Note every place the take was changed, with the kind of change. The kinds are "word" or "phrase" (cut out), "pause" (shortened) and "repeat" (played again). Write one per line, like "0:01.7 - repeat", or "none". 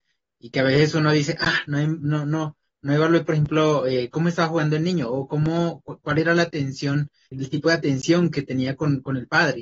0:07.3 - word